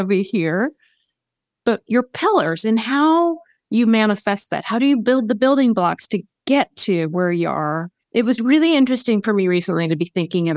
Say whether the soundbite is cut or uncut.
cut